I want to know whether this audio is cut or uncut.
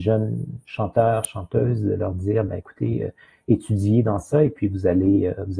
uncut